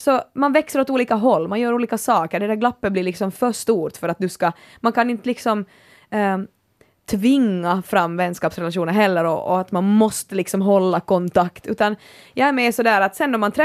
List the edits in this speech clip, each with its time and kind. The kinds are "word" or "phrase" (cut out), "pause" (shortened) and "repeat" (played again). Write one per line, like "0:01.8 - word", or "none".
none